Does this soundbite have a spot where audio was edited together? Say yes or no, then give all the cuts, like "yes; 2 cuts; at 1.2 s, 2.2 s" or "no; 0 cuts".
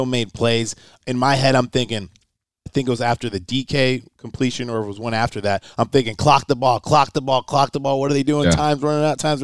yes; 1 cut; at 2.7 s